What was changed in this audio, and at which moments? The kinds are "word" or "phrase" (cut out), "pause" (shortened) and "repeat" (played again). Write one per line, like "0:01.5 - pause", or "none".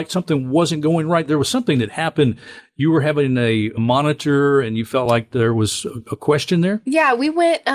none